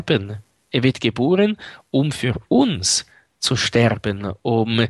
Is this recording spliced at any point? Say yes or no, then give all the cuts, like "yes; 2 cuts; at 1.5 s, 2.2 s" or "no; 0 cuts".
no; 0 cuts